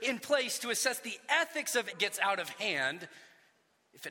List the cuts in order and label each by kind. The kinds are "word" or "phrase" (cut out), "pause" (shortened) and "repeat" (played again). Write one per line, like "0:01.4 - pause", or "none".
0:01.9 - phrase